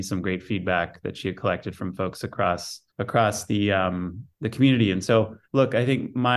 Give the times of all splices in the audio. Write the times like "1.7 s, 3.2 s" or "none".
2.9 s, 5.4 s